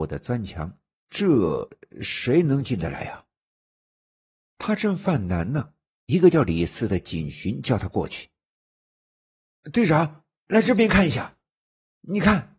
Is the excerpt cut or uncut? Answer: uncut